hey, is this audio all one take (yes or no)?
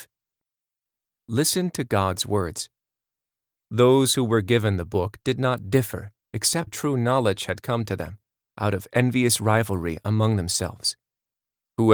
no